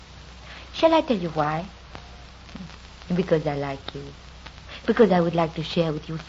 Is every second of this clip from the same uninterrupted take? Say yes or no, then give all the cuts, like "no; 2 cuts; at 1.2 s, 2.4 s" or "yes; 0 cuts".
yes; 0 cuts